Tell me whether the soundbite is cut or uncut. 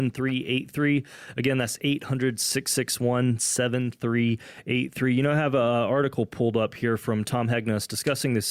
uncut